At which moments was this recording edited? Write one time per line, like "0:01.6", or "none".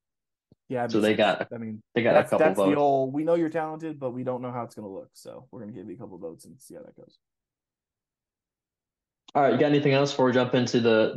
none